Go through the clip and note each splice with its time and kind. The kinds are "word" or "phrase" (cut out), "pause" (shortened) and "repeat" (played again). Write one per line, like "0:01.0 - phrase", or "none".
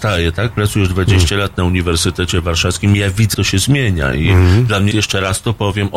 0:03.3 - word
0:04.9 - word